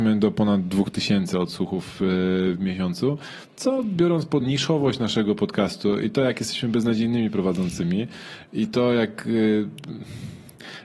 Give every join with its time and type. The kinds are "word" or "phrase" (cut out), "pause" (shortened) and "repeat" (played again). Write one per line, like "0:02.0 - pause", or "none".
0:03.5 - pause
0:04.4 - word